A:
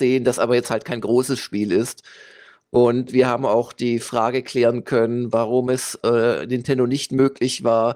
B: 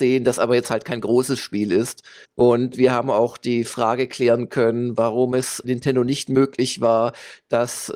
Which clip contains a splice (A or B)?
B